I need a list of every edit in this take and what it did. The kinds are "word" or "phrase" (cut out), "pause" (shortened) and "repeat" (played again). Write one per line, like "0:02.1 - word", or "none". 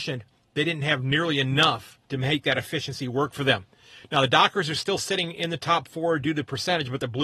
0:02.0 - pause